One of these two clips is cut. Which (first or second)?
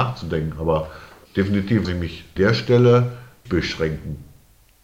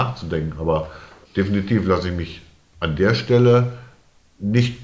first